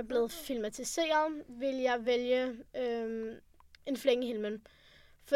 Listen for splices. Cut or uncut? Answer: uncut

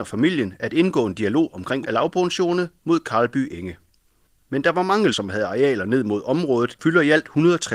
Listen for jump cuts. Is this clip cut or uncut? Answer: cut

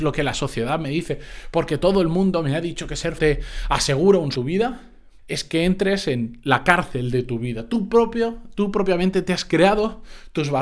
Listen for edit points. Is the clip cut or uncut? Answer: cut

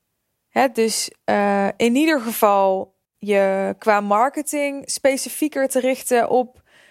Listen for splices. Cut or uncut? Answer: cut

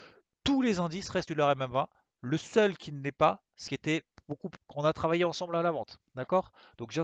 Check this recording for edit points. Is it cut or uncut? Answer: cut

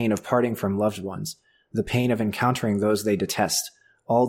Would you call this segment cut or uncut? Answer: uncut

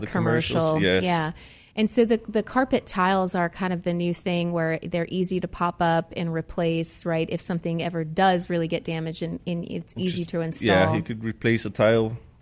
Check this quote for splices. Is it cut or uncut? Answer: uncut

